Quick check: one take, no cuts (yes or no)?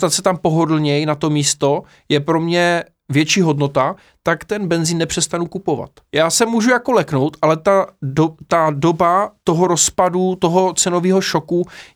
yes